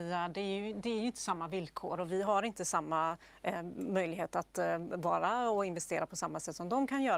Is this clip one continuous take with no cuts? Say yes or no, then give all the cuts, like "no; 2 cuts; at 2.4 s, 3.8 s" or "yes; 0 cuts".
yes; 0 cuts